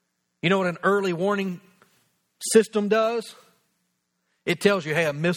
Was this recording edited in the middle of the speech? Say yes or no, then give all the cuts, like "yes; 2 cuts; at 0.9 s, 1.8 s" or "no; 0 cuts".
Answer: no; 0 cuts